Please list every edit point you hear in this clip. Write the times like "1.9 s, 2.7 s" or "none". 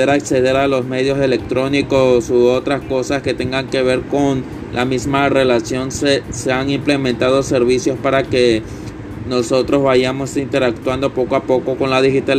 none